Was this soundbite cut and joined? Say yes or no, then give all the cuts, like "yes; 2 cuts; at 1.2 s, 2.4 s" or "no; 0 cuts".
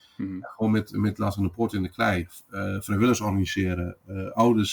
no; 0 cuts